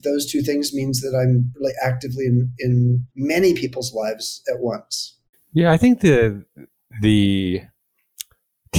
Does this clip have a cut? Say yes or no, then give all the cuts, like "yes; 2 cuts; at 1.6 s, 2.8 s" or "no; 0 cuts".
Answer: yes; 3 cuts; at 3.1 s, 5.3 s, 6.8 s